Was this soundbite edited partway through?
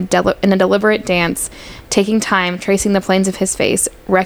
no; 0 cuts

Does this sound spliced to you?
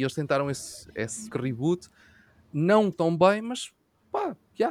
yes; 2 cuts; at 1.3 s, 2.9 s

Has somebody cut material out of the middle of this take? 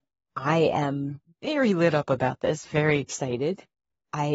no; 0 cuts

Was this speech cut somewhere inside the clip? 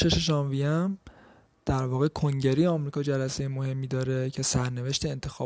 no; 0 cuts

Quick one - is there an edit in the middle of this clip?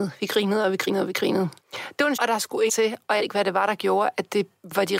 yes; 4 cuts; at 1.6 s, 2.2 s, 2.7 s, 3.2 s

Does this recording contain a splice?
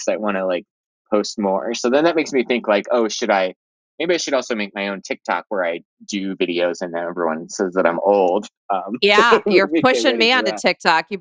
no; 0 cuts

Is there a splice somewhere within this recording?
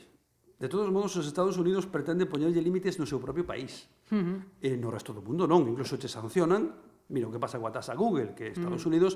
no; 0 cuts

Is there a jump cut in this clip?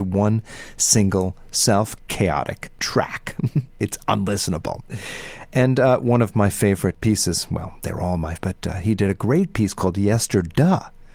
yes; 3 cuts; at 2.0 s, 2.8 s, 8.4 s

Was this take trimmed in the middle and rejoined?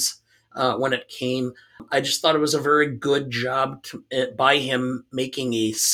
no; 0 cuts

